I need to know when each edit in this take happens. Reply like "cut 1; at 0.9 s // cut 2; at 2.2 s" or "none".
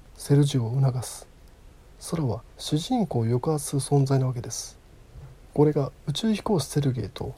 cut 1; at 2.5 s